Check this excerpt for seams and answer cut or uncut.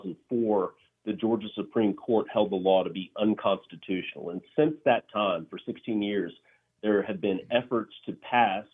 uncut